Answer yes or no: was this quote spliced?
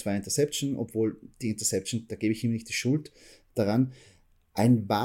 no